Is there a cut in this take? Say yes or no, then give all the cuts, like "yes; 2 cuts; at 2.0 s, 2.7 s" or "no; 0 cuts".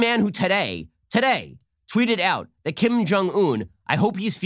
no; 0 cuts